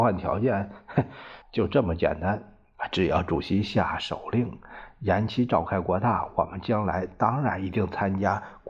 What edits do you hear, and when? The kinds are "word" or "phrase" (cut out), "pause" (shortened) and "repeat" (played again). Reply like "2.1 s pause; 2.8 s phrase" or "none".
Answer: 1.4 s pause